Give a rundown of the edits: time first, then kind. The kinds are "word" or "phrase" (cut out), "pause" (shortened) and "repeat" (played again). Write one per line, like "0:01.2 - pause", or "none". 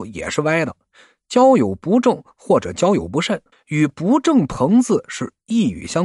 0:03.5 - pause

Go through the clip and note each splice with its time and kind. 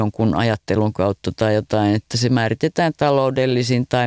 none

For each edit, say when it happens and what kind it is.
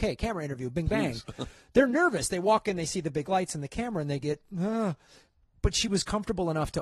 none

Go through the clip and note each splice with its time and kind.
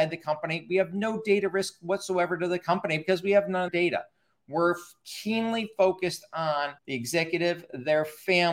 0:03.7 - word
0:06.8 - pause

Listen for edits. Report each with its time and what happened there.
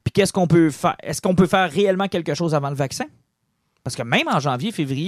none

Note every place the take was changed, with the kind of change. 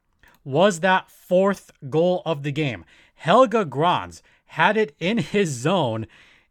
none

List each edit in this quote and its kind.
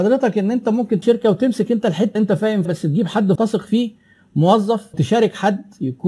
0:01.0 - word
0:02.1 - word
0:02.6 - word
0:03.3 - word
0:04.9 - word

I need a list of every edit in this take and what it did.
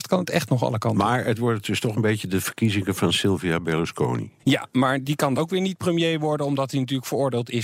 0:04.4 - pause
0:05.4 - word

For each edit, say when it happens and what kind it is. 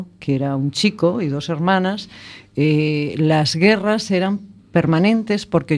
none

